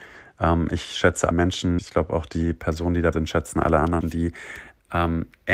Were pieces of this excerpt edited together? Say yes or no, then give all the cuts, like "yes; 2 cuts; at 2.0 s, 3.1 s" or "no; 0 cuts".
yes; 4 cuts; at 1.3 s, 1.8 s, 3.1 s, 4.0 s